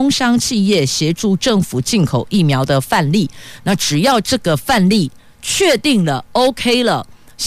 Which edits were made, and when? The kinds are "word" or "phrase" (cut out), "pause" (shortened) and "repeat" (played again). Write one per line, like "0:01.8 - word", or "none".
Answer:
none